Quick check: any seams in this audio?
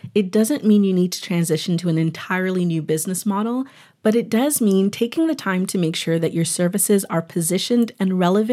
no; 0 cuts

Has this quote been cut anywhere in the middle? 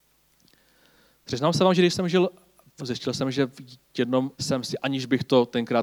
yes; 2 cuts; at 2.8 s, 4.3 s

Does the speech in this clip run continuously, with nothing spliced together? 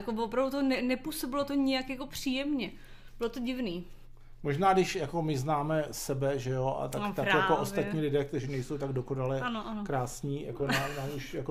yes; 0 cuts

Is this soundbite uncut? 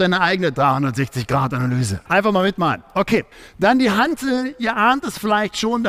no; 2 cuts; at 2.1 s, 3.3 s

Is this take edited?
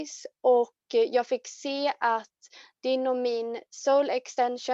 no; 0 cuts

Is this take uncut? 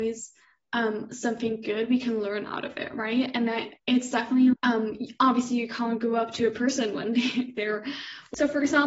no; 2 cuts; at 3.8 s, 4.5 s

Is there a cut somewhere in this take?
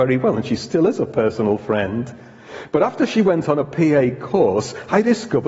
no; 0 cuts

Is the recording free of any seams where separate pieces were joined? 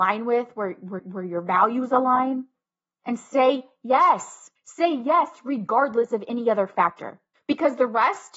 no; 3 cuts; at 1.0 s, 4.6 s, 7.3 s

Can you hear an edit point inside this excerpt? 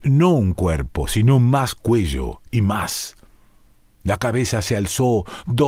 no; 0 cuts

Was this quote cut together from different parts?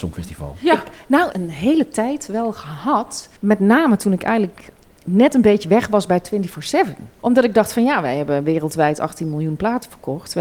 yes; 2 cuts; at 1.3 s, 3.4 s

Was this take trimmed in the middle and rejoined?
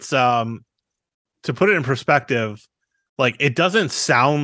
no; 0 cuts

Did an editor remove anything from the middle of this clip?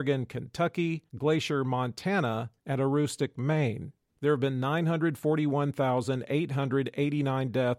yes; 3 cuts; at 1.1 s, 2.6 s, 4.0 s

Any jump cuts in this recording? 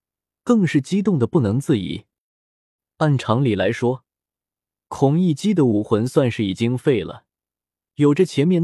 no; 0 cuts

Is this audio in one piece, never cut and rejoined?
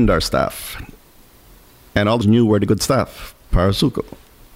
no; 2 cuts; at 2.2 s, 2.7 s

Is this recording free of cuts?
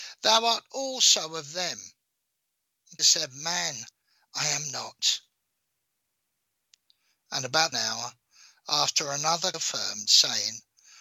no; 3 cuts; at 3.0 s, 7.7 s, 9.5 s

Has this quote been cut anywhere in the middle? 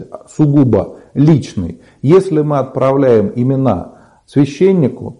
no; 0 cuts

